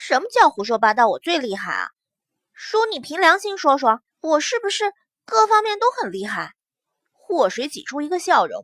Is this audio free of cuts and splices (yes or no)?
no